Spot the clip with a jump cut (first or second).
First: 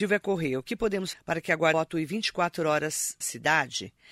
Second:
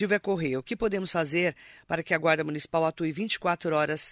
first